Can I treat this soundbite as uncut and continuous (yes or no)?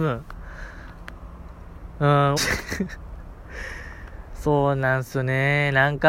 no